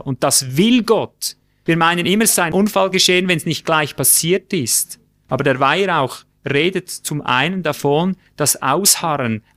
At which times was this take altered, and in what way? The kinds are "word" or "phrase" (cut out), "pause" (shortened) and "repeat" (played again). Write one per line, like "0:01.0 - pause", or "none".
none